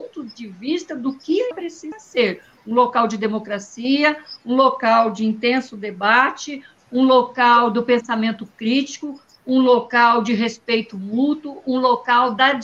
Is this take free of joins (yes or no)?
no